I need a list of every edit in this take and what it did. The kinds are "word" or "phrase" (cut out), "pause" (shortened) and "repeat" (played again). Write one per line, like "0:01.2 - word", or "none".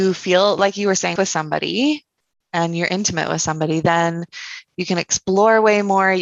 0:01.2 - phrase